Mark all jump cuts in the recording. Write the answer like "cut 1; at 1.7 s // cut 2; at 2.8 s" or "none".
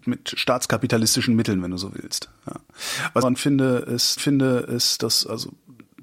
cut 1; at 3.2 s // cut 2; at 4.2 s